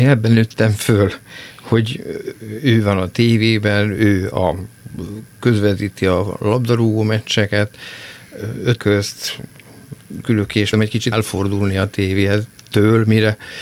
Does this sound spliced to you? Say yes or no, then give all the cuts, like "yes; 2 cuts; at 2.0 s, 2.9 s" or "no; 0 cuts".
yes; 4 cuts; at 8.8 s, 10.2 s, 10.7 s, 11.1 s